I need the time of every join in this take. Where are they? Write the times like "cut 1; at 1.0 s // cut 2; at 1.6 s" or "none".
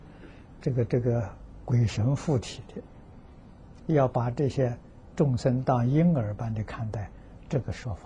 cut 1; at 3.8 s